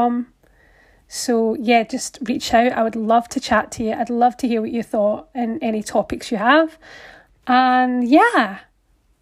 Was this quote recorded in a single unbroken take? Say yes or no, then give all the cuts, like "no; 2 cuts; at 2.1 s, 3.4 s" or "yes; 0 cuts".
yes; 0 cuts